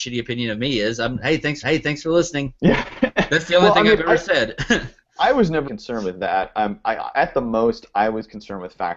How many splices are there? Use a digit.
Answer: 3